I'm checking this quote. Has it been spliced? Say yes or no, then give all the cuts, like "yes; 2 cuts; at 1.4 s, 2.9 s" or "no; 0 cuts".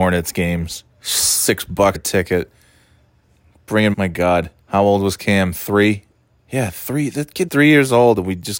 yes; 6 cuts; at 0.9 s, 1.9 s, 3.9 s, 4.6 s, 6.4 s, 7.5 s